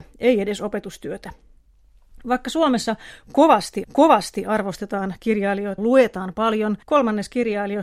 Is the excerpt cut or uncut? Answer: cut